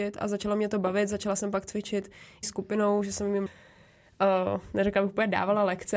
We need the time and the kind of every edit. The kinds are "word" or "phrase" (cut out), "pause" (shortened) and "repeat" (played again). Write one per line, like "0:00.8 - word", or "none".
0:02.4 - phrase
0:03.5 - word